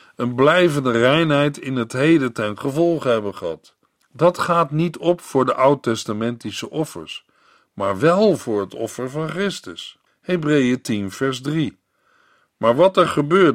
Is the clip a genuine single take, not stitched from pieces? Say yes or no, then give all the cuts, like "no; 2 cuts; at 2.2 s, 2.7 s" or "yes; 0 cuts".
no; 2 cuts; at 3.9 s, 10.1 s